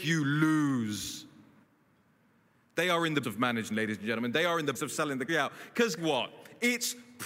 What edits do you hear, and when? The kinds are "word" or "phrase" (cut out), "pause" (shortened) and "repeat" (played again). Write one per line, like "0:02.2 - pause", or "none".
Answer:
0:03.2 - word
0:03.7 - word
0:04.8 - word
0:05.3 - word
0:06.0 - word